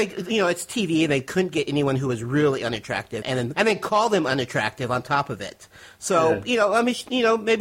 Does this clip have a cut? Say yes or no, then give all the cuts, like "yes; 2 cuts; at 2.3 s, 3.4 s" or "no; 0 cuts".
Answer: yes; 2 cuts; at 3.2 s, 3.5 s